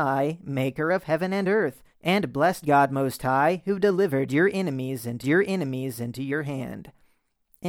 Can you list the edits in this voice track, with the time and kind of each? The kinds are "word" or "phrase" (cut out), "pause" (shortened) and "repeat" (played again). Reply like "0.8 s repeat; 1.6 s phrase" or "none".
1.9 s pause; 2.6 s word; 5.2 s repeat